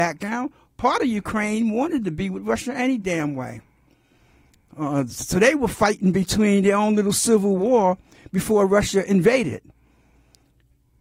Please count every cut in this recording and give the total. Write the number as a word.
zero